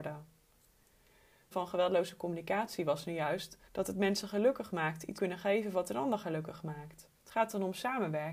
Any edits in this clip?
yes; 4 cuts; at 1.5 s, 3.7 s, 5.1 s, 7.1 s

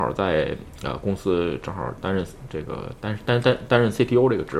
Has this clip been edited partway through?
no; 0 cuts

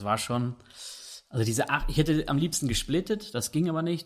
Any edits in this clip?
no; 0 cuts

